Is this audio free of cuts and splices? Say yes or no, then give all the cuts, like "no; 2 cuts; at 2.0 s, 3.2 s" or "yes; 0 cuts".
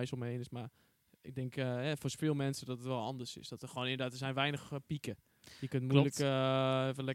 yes; 0 cuts